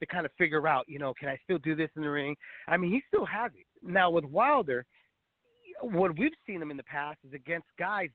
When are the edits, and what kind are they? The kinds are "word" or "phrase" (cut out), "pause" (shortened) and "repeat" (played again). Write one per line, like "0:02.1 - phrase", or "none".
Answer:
0:03.8 - pause